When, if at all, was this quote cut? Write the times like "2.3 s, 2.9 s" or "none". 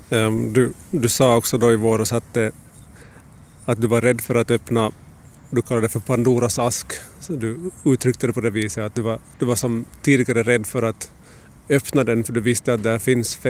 none

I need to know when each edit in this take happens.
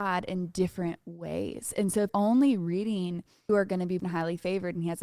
2.1 s, 3.5 s, 4.0 s

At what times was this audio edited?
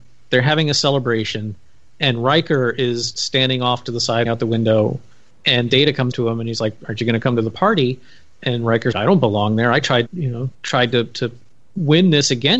3.1 s, 4.3 s, 6.1 s, 6.8 s, 8.9 s, 10.1 s, 10.5 s

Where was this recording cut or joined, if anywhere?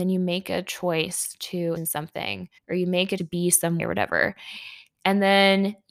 1.8 s, 2.6 s, 3.2 s, 3.8 s

